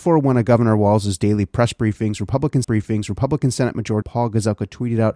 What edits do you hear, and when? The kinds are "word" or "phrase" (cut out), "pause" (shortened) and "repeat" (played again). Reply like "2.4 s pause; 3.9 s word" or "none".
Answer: 2.6 s repeat; 4.0 s word